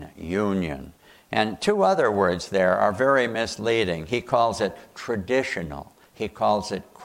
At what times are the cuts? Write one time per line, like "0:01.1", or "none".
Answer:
none